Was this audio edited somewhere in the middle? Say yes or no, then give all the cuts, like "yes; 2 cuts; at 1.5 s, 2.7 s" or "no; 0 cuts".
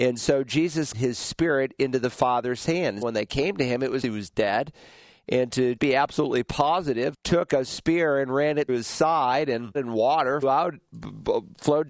yes; 8 cuts; at 0.9 s, 3.0 s, 4.0 s, 5.8 s, 7.1 s, 8.7 s, 9.7 s, 10.4 s